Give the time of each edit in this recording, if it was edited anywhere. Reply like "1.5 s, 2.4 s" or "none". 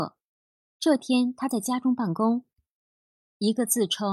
none

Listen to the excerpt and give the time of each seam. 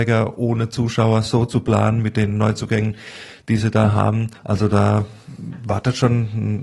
4.4 s

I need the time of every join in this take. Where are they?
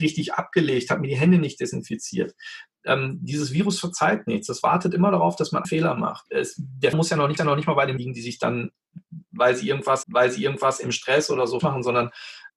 5.6 s, 6.9 s, 7.4 s, 8.0 s, 10.0 s, 11.6 s

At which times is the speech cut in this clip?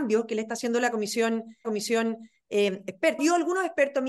1.6 s, 3.2 s

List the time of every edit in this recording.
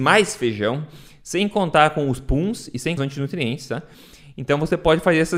3.0 s

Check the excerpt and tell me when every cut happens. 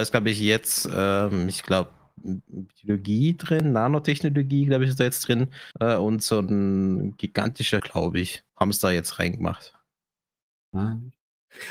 5.7 s, 7.8 s, 8.5 s

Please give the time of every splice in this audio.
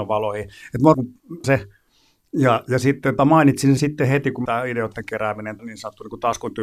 0.9 s, 1.4 s, 3.2 s, 3.8 s, 4.5 s, 5.6 s

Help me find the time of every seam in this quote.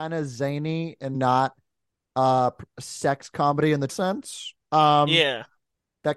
1.1 s, 3.9 s

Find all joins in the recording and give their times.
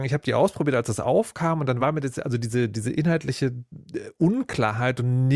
none

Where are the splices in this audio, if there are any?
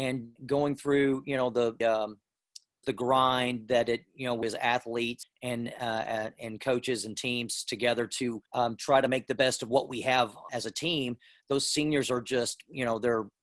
1.8 s, 2.8 s, 4.4 s, 5.2 s, 8.5 s, 10.5 s

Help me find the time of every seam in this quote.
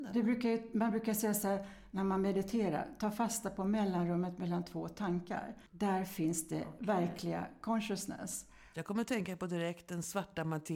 5.7 s

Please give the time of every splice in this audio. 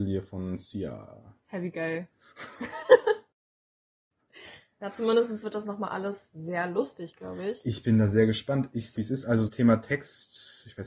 8.9 s, 9.5 s

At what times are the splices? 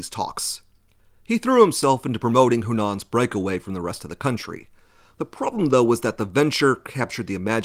none

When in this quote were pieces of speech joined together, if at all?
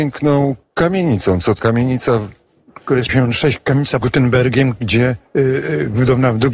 1.6 s, 3.1 s, 4.0 s

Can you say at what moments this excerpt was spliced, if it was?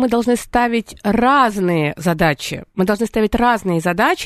none

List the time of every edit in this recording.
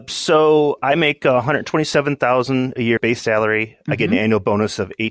3.0 s

